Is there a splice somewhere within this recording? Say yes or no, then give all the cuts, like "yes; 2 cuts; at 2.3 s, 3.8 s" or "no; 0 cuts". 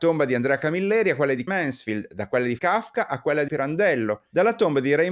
yes; 3 cuts; at 1.5 s, 2.6 s, 3.5 s